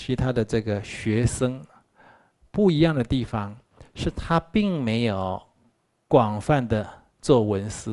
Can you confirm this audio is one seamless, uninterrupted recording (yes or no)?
yes